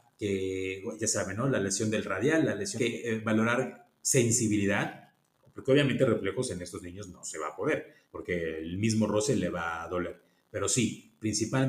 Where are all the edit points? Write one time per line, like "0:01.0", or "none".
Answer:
0:02.8
0:08.0